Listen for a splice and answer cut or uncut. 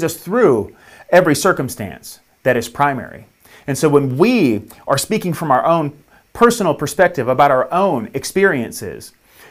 uncut